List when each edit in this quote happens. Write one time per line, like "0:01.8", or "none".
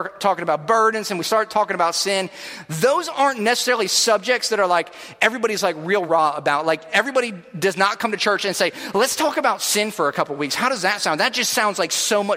0:06.1